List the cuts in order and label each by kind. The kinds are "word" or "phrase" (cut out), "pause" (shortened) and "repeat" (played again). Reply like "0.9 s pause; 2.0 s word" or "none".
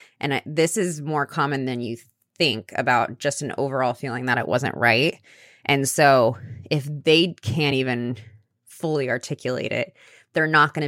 none